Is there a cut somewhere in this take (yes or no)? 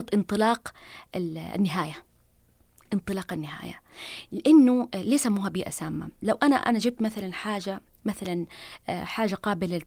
no